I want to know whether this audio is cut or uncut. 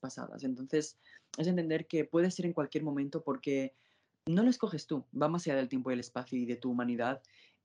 uncut